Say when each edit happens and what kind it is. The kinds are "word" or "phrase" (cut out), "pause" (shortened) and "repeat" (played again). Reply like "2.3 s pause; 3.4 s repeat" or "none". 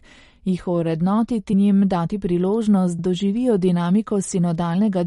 1.5 s word; 3.0 s word

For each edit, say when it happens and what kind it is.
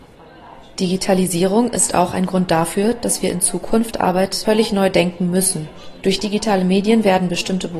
none

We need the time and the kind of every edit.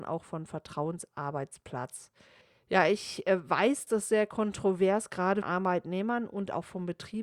2.4 s pause; 3.9 s word; 5.4 s word

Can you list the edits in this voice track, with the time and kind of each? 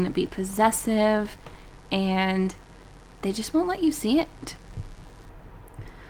none

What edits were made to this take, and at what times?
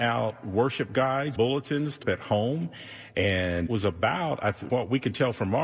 1.4 s word; 2.0 s word; 3.7 s word; 4.7 s word

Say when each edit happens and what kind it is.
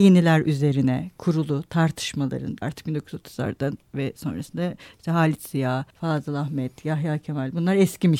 2.6 s word; 5.9 s pause

